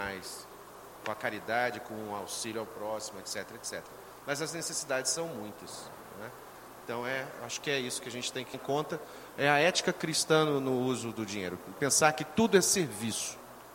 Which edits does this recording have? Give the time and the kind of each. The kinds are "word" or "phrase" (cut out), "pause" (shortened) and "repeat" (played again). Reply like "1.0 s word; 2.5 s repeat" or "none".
8.5 s word

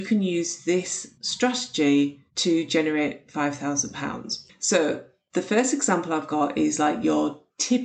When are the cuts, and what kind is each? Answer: 2.3 s pause

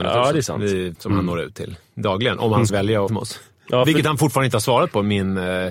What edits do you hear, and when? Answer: 1.0 s word; 2.7 s word; 3.1 s phrase

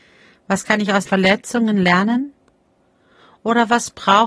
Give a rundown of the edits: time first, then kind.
1.1 s word

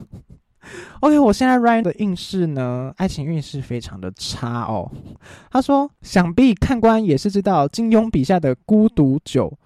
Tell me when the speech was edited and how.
1.8 s word

